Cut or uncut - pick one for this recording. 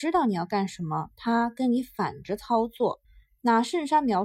cut